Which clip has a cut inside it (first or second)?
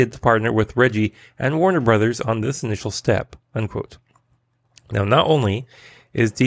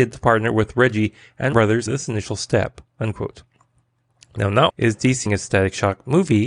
second